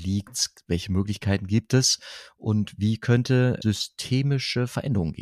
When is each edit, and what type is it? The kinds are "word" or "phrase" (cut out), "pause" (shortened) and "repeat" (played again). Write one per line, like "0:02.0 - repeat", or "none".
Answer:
0:03.6 - word

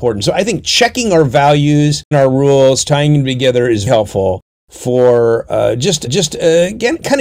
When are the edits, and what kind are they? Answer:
0:02.1 - phrase
0:03.9 - word
0:06.1 - repeat

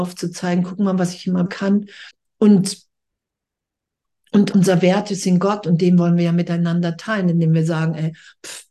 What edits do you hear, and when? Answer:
0:01.5 - word
0:02.1 - pause
0:04.5 - word

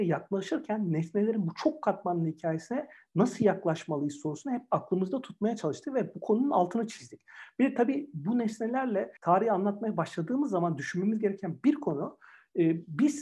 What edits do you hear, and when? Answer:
0:09.2 - pause

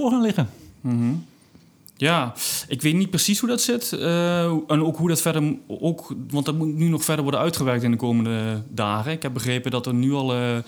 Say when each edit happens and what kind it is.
none

